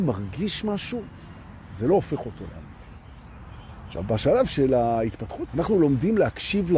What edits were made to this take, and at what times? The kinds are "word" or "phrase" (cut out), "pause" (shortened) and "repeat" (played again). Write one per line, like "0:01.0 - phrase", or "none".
0:05.5 - word